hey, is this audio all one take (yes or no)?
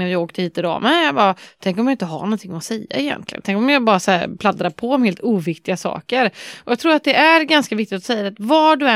yes